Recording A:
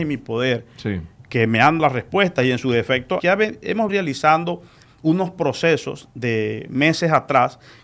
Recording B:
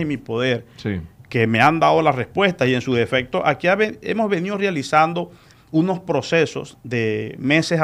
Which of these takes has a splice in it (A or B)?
A